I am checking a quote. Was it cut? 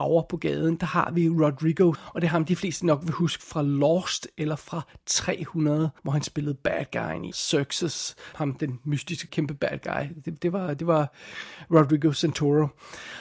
yes; 5 cuts; at 1.9 s, 6.0 s, 7.3 s, 8.3 s, 9.3 s

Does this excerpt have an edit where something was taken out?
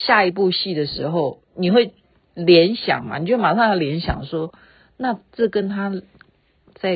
yes; 1 cut; at 1.4 s

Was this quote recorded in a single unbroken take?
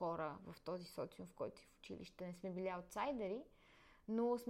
yes; 0 cuts

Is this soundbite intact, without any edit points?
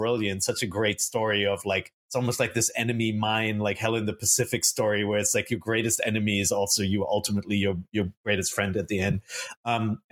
no; 1 cut; at 2.0 s

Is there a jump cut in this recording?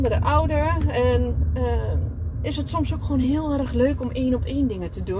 no; 0 cuts

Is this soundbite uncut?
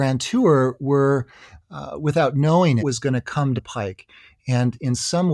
no; 2 cuts; at 2.8 s, 3.6 s

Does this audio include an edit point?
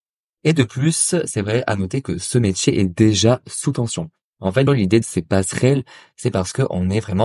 yes; 2 cuts; at 4.7 s, 5.0 s

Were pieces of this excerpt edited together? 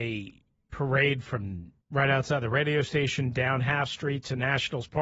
yes; 1 cut; at 1.8 s

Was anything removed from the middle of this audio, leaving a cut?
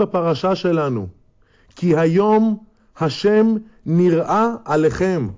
no; 0 cuts

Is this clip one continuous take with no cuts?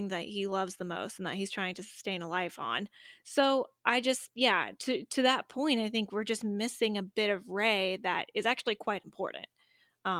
yes; 0 cuts

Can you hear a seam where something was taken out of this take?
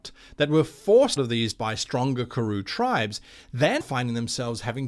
yes; 3 cuts; at 1.2 s, 1.5 s, 3.8 s

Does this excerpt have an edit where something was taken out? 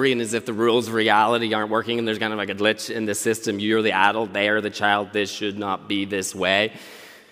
no; 0 cuts

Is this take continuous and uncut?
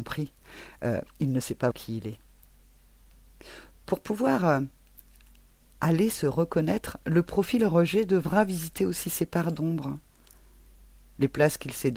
no; 1 cut; at 1.7 s

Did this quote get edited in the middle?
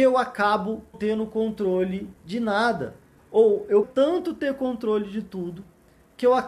yes; 4 cuts; at 0.9 s, 2.2 s, 3.2 s, 3.8 s

